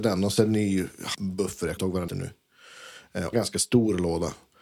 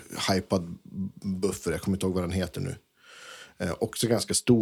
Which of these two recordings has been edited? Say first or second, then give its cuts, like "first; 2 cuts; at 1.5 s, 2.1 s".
first; 4 cuts; at 1.1 s, 1.8 s, 2.1 s, 3.3 s